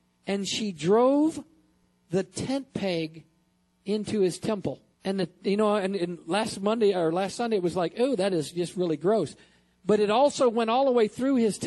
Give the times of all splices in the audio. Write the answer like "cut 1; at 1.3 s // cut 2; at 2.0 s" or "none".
cut 1; at 4.9 s